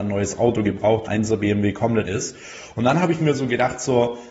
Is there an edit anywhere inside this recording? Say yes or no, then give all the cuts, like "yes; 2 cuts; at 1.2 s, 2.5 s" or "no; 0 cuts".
yes; 2 cuts; at 1.1 s, 2.1 s